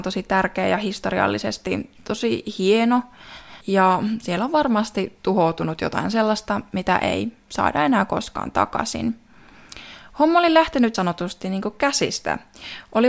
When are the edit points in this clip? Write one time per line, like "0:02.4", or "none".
0:03.6
0:10.9